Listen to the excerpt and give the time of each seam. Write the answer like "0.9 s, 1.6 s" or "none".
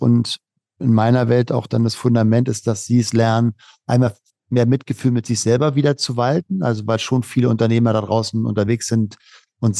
none